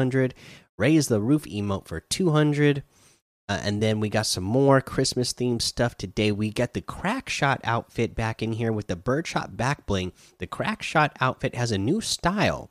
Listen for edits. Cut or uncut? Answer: uncut